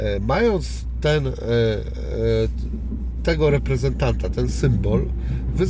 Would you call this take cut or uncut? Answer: uncut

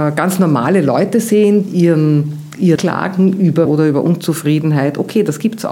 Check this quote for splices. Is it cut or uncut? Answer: cut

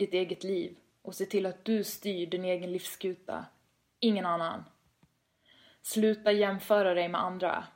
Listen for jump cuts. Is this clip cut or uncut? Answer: uncut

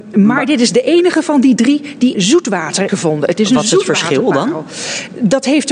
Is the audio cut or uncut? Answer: cut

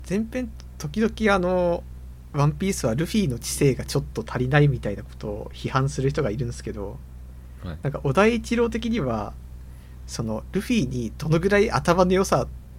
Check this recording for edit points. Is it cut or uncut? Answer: uncut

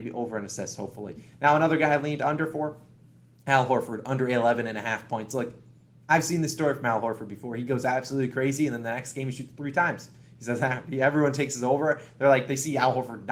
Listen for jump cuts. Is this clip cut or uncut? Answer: uncut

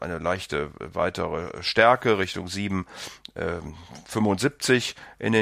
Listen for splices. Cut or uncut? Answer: uncut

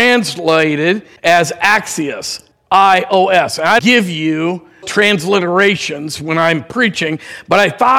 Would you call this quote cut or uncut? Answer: cut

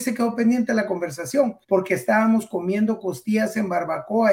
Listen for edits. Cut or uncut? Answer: cut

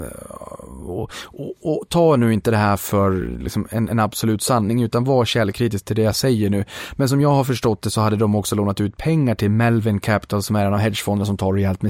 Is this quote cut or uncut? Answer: uncut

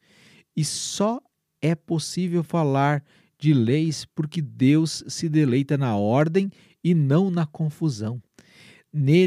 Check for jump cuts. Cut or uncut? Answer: uncut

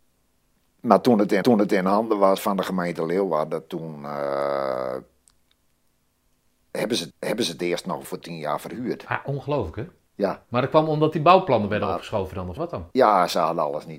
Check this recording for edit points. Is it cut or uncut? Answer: cut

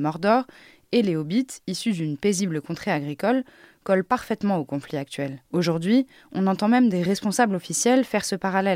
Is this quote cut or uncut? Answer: cut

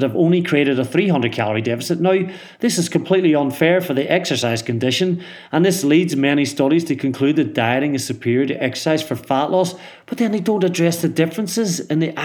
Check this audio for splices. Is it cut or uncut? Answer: uncut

